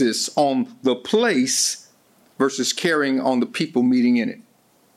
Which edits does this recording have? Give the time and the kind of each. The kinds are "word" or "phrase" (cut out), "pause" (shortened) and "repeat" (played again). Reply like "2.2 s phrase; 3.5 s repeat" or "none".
none

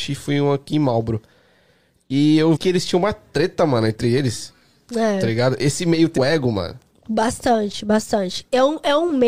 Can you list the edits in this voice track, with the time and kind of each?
2.6 s word; 6.2 s word

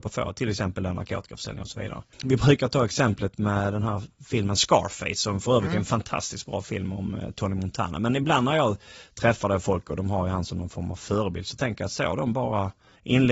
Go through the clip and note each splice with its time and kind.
none

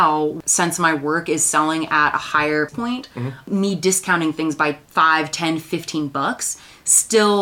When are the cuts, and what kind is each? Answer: 2.7 s word

